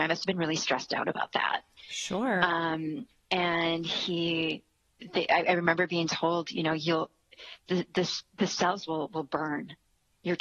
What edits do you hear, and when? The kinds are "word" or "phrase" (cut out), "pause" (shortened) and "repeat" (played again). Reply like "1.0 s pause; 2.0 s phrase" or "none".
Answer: none